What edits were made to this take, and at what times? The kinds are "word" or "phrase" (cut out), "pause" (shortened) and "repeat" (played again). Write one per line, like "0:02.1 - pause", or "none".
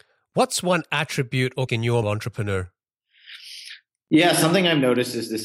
0:01.7 - word
0:02.0 - phrase